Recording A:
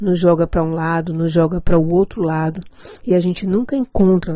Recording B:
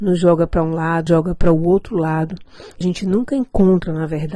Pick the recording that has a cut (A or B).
B